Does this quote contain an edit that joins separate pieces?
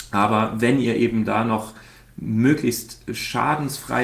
no; 0 cuts

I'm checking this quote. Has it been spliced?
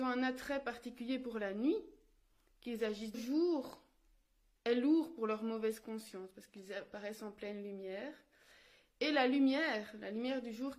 yes; 1 cut; at 3.1 s

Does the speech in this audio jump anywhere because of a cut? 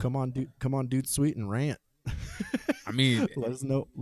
no; 0 cuts

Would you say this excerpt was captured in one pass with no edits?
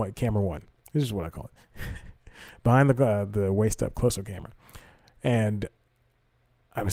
yes; 0 cuts

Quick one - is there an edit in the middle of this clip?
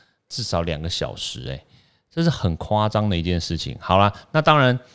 no; 0 cuts

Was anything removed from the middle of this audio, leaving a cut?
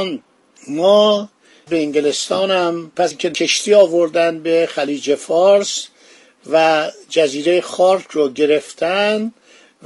yes; 2 cuts; at 1.7 s, 3.1 s

